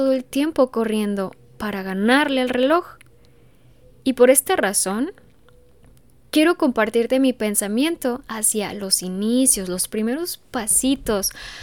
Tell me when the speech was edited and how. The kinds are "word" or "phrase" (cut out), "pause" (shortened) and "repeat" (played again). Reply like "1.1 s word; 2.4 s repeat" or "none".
none